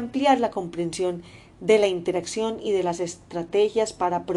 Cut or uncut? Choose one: uncut